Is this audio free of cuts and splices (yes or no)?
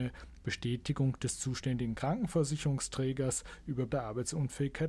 no